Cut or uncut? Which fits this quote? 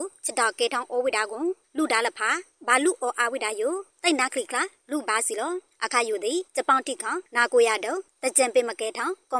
cut